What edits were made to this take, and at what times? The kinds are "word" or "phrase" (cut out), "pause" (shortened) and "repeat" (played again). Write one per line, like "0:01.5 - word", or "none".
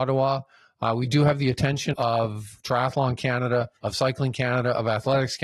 0:01.9 - word
0:03.8 - pause